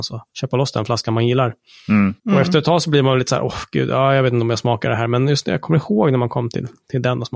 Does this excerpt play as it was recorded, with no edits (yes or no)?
yes